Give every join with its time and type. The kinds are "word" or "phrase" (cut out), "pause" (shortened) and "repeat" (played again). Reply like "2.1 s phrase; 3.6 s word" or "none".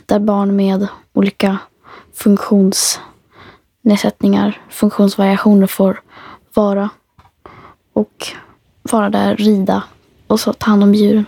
8.6 s pause